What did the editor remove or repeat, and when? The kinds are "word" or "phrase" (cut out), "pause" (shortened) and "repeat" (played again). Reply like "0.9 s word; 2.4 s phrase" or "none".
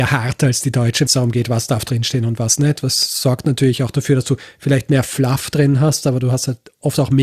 1.1 s phrase